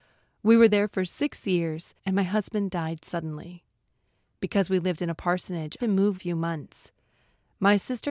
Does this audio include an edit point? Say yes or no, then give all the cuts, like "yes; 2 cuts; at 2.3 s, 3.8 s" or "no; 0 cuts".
yes; 3 cuts; at 2.0 s, 5.8 s, 6.1 s